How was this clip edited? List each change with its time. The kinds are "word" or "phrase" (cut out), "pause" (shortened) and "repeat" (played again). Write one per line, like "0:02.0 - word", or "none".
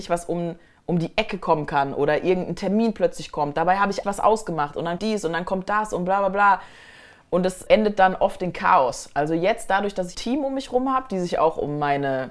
0:04.0 - word
0:05.0 - word
0:07.7 - word
0:10.1 - word

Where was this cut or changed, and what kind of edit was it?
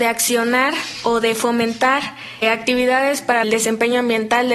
0:02.4 - word
0:03.4 - phrase

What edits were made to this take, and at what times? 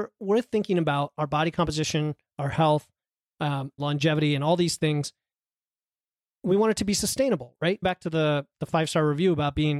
0:03.8 - word
0:07.8 - word

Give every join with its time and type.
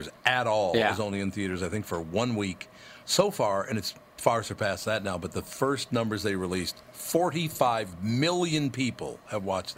0:03.0 - pause

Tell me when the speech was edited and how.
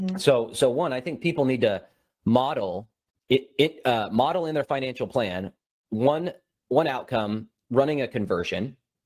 none

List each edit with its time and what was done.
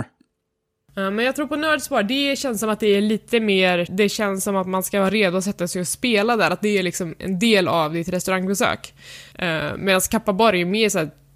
0:03.9 - word
0:09.3 - pause

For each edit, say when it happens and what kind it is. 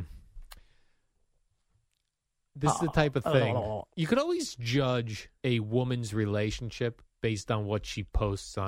0:03.9 - pause
0:05.4 - pause

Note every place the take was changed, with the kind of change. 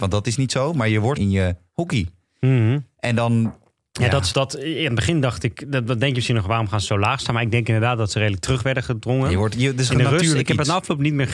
0:01.2 - phrase
0:04.3 - word

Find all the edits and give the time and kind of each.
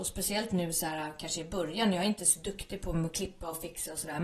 none

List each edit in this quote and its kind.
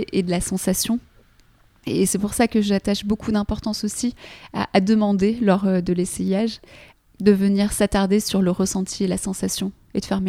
none

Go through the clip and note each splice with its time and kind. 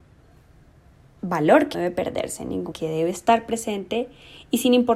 0:01.7 - word
0:02.7 - word

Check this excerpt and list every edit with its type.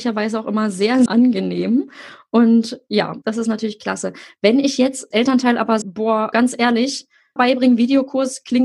0:01.1 - word
0:03.2 - word
0:05.1 - word
0:05.8 - word
0:06.3 - word
0:07.4 - word

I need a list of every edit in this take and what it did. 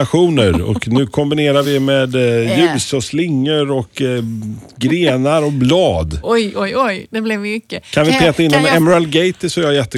none

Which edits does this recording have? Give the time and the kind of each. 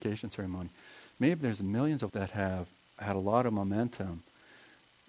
0:02.1 - word

